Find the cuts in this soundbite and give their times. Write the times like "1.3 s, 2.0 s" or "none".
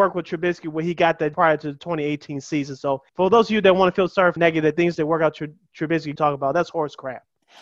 1.3 s, 3.1 s, 4.4 s, 6.2 s